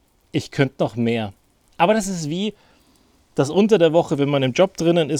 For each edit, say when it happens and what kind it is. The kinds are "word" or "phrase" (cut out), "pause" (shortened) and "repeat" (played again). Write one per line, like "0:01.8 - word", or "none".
none